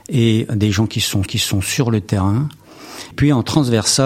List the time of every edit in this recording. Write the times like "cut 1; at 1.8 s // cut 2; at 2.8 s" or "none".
cut 1; at 1.3 s // cut 2; at 3.1 s